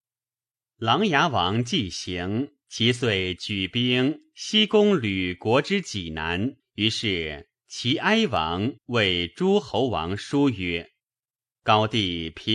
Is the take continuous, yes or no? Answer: no